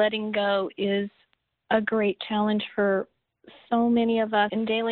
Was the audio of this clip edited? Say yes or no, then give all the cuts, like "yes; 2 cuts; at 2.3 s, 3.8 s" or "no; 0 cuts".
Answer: no; 0 cuts